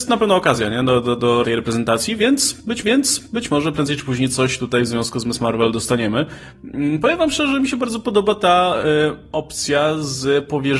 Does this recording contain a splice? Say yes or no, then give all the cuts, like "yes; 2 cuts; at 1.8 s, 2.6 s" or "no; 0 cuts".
yes; 2 cuts; at 1.4 s, 2.8 s